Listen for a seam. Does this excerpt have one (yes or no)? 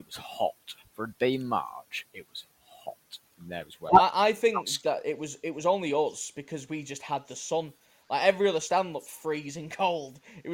no